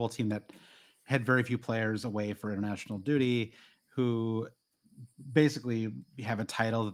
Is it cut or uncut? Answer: uncut